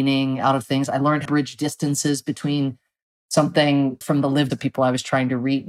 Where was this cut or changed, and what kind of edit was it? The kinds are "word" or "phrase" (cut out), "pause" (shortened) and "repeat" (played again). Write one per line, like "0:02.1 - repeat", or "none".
0:01.3 - word
0:04.0 - word
0:04.5 - word